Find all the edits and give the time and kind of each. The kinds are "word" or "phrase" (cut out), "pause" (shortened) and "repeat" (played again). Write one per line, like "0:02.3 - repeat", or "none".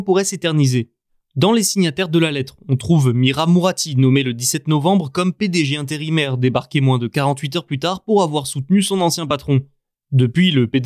none